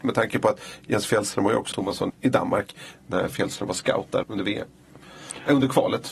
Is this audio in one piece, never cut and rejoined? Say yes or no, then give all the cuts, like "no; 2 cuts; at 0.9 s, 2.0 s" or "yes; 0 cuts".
no; 3 cuts; at 1.7 s, 2.1 s, 4.2 s